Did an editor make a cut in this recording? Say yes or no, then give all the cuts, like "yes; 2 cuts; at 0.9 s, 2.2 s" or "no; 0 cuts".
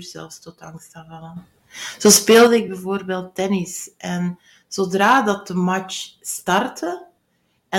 no; 0 cuts